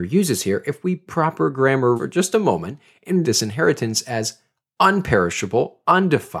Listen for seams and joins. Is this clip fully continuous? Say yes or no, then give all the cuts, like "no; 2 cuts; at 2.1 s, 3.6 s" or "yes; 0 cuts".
no; 3 cuts; at 1.1 s, 2.0 s, 3.2 s